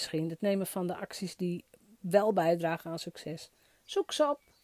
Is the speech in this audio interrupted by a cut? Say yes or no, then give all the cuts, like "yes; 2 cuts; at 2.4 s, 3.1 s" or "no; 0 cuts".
no; 0 cuts